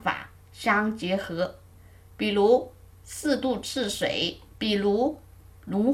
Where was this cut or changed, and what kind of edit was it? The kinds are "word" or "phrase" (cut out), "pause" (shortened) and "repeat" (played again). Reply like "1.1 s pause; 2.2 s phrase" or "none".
4.5 s pause